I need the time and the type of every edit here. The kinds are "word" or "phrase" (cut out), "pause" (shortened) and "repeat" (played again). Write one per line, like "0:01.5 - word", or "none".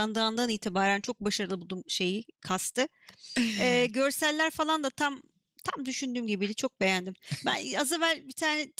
none